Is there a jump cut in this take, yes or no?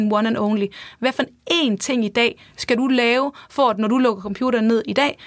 no